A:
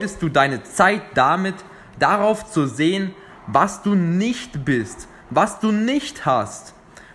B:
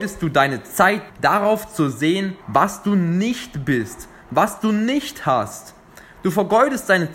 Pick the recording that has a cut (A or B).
B